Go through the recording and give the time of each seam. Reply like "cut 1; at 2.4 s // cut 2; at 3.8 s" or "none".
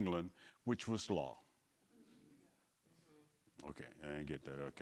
cut 1; at 1.1 s